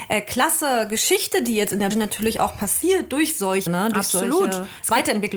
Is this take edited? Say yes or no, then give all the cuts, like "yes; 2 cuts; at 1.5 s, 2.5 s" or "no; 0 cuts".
yes; 2 cuts; at 1.9 s, 3.7 s